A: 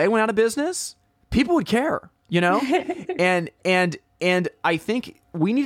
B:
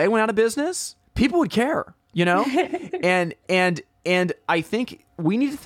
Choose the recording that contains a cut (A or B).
B